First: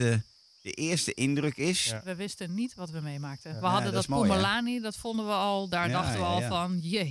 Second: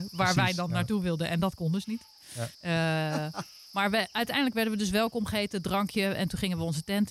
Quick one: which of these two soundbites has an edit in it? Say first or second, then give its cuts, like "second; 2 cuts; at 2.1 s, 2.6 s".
second; 1 cut; at 2.5 s